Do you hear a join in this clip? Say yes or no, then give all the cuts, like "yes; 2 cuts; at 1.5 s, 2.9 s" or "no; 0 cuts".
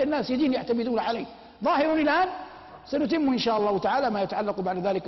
no; 0 cuts